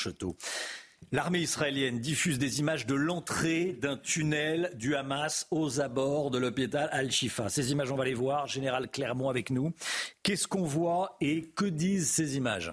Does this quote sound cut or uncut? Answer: uncut